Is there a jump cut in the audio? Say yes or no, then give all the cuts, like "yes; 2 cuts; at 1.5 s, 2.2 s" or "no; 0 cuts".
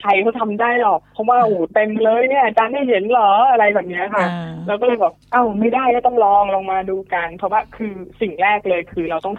yes; 1 cut; at 5.2 s